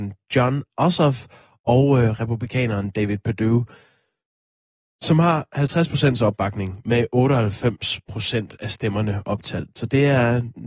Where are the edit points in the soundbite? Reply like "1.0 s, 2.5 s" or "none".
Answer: none